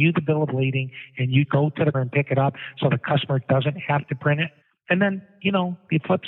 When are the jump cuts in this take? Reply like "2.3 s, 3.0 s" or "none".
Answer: 1.4 s, 1.9 s, 4.6 s